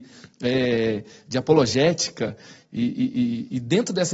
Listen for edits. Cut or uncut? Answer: uncut